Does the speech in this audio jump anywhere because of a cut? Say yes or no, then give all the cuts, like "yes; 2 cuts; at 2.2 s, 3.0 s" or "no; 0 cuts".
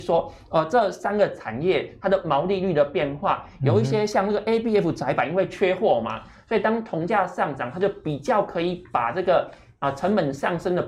no; 0 cuts